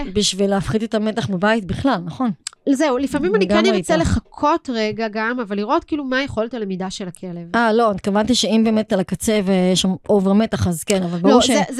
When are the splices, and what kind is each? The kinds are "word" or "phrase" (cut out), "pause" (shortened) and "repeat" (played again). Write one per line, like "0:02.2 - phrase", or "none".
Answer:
0:08.9 - word